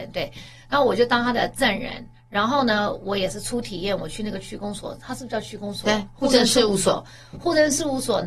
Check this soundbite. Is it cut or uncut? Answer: uncut